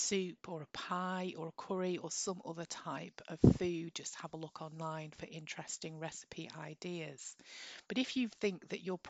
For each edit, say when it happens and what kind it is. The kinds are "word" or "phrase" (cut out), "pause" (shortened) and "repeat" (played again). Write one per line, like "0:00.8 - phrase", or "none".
none

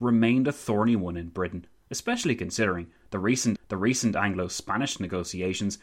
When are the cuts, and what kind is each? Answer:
0:03.6 - repeat

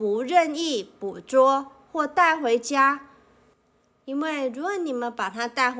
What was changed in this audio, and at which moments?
none

